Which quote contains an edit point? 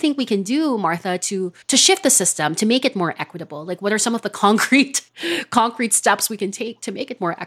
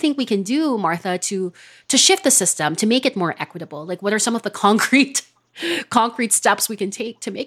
first; 2 cuts; at 1.6 s, 5.1 s

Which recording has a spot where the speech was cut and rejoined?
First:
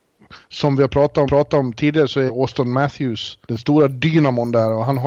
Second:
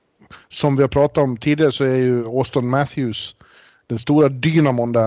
first; 3 cuts; at 1.3 s, 2.3 s, 3.4 s

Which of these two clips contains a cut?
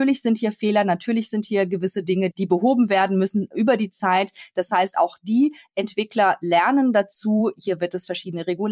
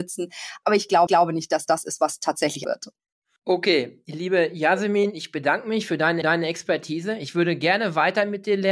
second; 4 cuts; at 1.1 s, 1.7 s, 2.6 s, 6.2 s

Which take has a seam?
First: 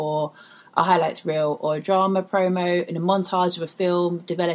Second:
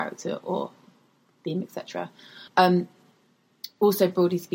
second; 1 cut; at 2.5 s

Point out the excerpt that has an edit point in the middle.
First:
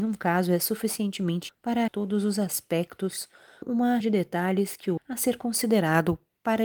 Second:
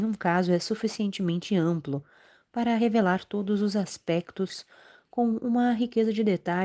first; 5 cuts; at 1.5 s, 1.9 s, 3.6 s, 4.0 s, 5.0 s

